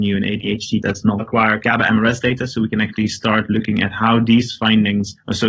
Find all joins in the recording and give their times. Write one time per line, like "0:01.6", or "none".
0:01.2